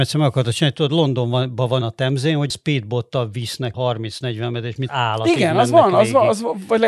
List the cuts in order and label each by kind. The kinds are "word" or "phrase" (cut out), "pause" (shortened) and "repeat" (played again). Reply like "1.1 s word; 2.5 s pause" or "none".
1.8 s word; 2.5 s word; 3.7 s word; 4.9 s word